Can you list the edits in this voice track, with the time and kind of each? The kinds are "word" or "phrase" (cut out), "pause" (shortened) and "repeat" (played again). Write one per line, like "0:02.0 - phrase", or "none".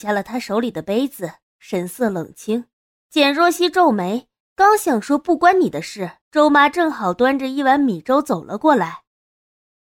0:02.9 - pause
0:06.2 - pause